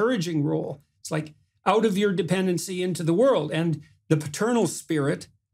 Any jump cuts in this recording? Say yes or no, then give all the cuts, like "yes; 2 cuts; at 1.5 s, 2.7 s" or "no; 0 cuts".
no; 0 cuts